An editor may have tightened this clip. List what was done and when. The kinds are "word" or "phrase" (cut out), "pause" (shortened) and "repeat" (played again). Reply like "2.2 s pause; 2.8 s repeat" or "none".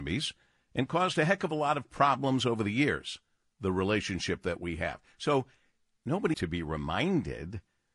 6.3 s word